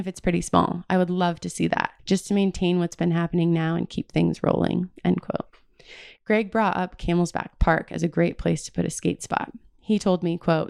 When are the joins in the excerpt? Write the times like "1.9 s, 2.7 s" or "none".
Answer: 2.0 s